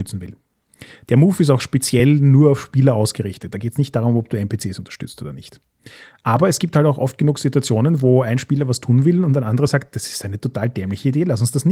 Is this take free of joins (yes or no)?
yes